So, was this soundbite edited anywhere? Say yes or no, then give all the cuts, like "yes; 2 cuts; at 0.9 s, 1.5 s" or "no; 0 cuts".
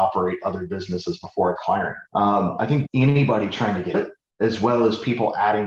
yes; 4 cuts; at 1.6 s, 2.1 s, 2.9 s, 3.9 s